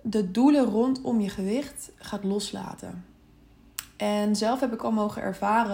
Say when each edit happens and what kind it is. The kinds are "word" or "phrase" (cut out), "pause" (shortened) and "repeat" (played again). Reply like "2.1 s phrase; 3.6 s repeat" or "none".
4.8 s word